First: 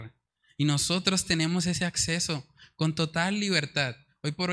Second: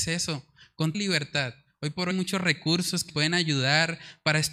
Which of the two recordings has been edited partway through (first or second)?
second